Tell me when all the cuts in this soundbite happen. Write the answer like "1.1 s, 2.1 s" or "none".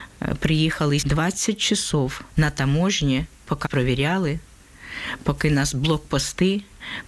1.0 s, 2.3 s, 3.6 s